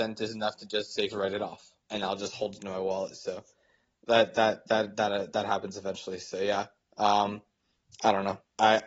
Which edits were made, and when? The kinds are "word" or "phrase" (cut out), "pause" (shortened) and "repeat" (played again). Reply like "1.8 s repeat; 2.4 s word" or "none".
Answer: 1.1 s phrase